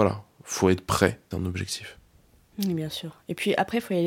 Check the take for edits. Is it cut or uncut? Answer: cut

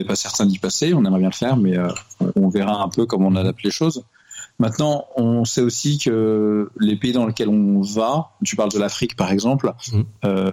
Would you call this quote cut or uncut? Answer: uncut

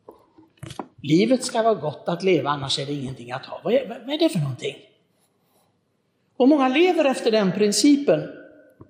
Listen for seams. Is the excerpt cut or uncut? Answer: cut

